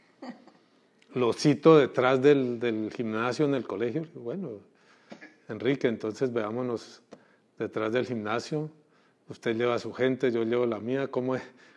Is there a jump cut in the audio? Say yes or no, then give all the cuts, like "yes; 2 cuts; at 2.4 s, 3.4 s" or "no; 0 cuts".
no; 0 cuts